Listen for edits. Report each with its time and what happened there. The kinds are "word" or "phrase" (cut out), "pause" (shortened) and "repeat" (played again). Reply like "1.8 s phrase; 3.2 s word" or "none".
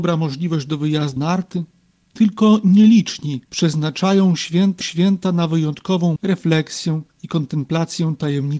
1.2 s word; 1.8 s pause; 3.4 s pause; 4.8 s repeat; 6.2 s word; 7.1 s pause